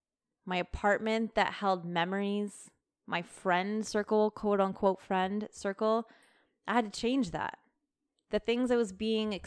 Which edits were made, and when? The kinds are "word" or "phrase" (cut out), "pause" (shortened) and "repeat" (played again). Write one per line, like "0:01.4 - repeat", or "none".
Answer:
none